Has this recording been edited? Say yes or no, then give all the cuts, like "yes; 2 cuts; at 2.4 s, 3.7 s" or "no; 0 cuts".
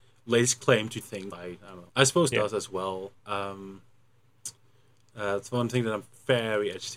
yes; 5 cuts; at 1.0 s, 1.3 s, 1.9 s, 2.3 s, 3.2 s